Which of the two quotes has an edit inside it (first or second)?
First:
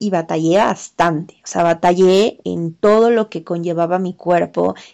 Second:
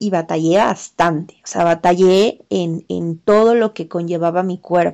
first